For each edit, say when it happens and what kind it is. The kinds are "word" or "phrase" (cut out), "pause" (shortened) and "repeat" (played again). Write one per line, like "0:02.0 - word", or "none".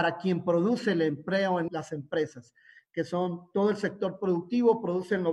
0:01.7 - phrase